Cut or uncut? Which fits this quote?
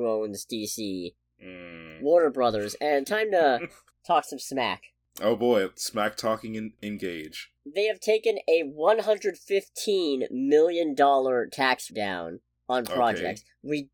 cut